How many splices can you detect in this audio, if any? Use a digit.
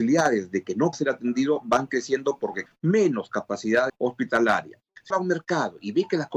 4